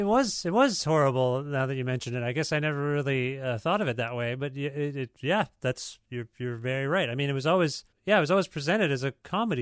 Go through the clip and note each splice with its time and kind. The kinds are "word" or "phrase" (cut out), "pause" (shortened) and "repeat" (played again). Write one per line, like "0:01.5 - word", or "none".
0:07.9 - pause